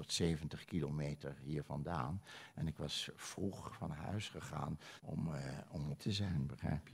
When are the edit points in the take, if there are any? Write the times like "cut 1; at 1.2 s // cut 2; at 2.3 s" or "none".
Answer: cut 1; at 5.0 s // cut 2; at 6.0 s